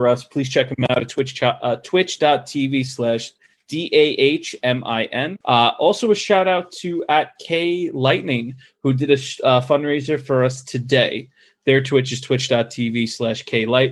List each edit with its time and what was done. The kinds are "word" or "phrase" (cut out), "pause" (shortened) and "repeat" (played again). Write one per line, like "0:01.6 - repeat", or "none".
0:05.4 - pause